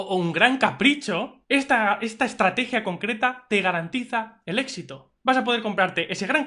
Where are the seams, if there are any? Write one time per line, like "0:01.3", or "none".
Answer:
0:01.4
0:05.2